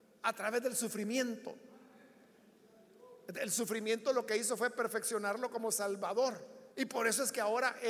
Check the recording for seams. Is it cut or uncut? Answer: cut